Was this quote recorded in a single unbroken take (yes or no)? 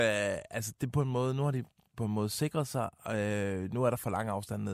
yes